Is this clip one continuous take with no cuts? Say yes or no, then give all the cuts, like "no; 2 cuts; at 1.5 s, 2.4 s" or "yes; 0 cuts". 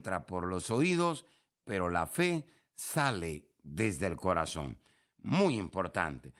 yes; 0 cuts